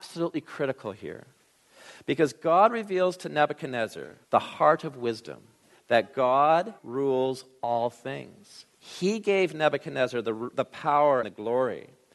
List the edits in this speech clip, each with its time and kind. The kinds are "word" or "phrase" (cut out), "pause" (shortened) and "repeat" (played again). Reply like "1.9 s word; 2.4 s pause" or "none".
4.2 s pause; 5.6 s pause; 6.8 s pause; 8.7 s pause; 11.2 s word